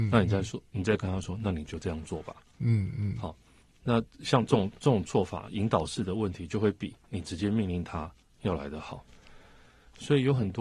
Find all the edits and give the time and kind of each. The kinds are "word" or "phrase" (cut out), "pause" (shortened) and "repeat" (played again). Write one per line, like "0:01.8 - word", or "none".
none